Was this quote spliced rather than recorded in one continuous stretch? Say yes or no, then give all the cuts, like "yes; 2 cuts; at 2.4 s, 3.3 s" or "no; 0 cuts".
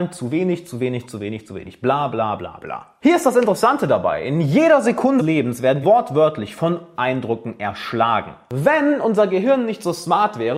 yes; 4 cuts; at 2.4 s, 5.2 s, 5.8 s, 7.0 s